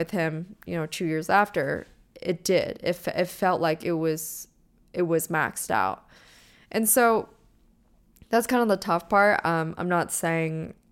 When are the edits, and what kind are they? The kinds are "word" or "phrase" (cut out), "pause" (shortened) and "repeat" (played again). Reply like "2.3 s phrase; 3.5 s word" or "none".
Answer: none